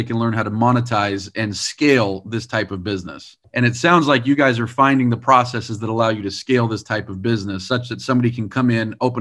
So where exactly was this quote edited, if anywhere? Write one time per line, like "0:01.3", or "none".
none